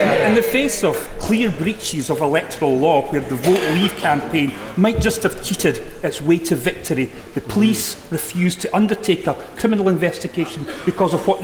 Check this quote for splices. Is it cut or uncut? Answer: uncut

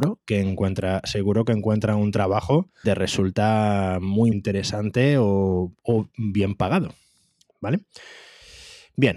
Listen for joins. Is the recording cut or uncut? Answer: cut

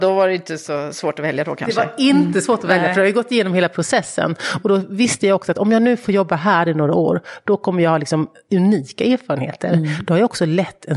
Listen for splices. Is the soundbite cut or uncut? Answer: uncut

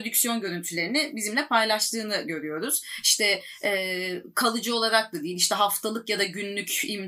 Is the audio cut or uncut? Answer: uncut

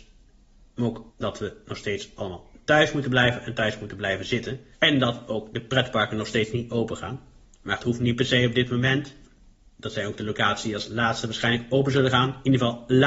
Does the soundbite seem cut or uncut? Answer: cut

